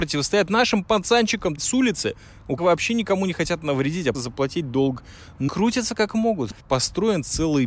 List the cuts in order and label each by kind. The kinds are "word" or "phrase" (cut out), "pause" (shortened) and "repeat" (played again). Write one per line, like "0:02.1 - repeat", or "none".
0:01.6 - phrase
0:02.6 - word
0:04.1 - word
0:05.5 - word
0:06.6 - pause